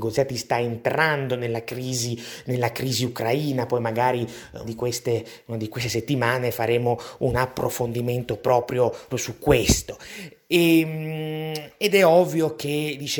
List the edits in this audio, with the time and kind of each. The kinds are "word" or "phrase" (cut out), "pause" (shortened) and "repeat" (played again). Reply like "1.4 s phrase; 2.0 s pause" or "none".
4.6 s word; 9.1 s word